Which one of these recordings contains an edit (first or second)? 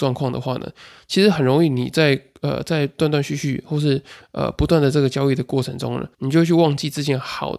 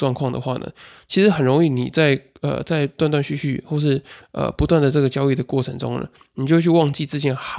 first